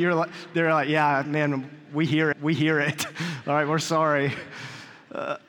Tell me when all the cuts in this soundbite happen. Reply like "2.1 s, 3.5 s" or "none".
2.3 s